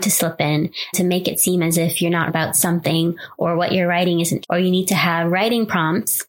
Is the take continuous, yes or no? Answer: no